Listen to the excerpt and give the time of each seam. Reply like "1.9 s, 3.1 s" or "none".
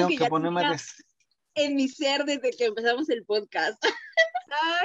none